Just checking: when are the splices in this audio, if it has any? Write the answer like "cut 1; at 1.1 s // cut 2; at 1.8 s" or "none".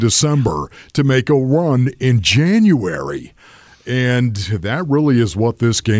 none